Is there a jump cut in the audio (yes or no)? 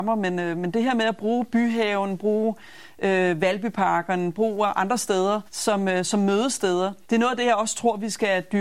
yes